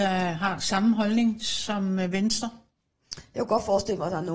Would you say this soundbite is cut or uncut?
uncut